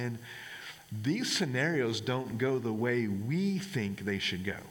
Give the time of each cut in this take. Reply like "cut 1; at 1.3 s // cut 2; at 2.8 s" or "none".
none